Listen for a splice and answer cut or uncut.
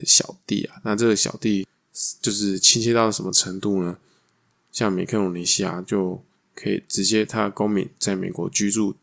uncut